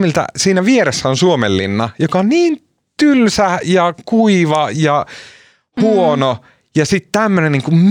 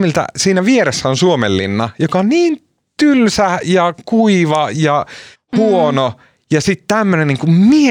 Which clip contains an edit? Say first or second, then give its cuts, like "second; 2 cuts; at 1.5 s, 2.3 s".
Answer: second; 1 cut; at 5.3 s